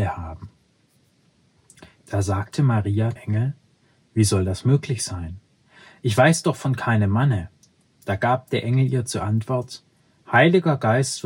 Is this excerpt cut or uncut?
cut